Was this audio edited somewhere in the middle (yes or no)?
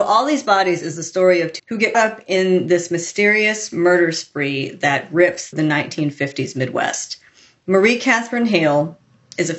yes